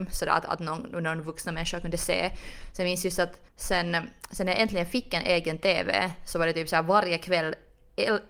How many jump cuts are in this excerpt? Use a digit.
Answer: 1